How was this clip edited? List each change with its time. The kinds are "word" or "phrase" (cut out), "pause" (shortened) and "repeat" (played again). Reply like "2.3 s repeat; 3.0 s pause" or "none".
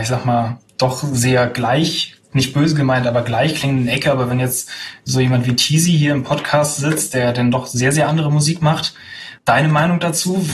9.4 s pause